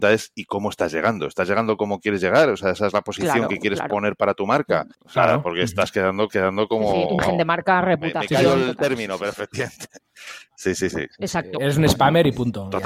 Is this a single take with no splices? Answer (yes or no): no